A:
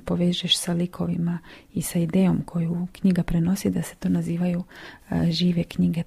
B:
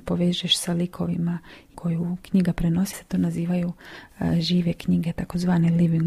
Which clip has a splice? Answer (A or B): B